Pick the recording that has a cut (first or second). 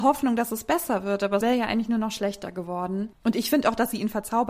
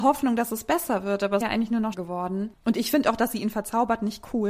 second